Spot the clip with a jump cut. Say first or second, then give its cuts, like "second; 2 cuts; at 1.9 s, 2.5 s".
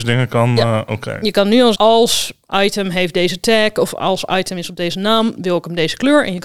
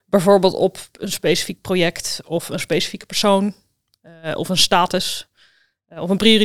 first; 2 cuts; at 1.7 s, 5.4 s